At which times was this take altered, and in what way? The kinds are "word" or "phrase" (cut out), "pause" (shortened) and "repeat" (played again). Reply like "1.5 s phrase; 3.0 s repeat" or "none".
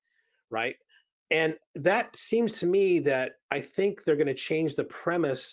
none